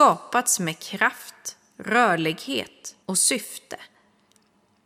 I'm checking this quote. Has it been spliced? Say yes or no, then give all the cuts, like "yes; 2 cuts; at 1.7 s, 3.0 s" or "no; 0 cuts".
yes; 1 cut; at 3.0 s